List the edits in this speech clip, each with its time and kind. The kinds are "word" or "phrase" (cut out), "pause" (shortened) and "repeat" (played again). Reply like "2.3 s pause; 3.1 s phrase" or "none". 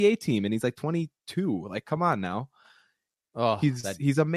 none